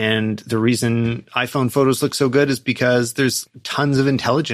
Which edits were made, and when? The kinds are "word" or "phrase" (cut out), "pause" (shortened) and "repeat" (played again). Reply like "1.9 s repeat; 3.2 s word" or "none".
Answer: none